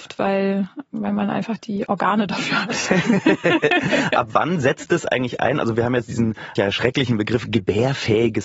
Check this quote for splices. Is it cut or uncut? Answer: cut